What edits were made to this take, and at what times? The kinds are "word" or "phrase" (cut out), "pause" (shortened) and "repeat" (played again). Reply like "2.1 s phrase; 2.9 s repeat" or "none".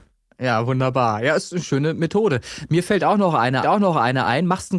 3.6 s repeat